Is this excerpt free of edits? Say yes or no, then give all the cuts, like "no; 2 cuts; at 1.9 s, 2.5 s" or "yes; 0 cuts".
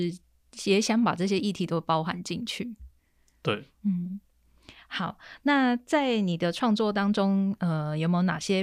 yes; 0 cuts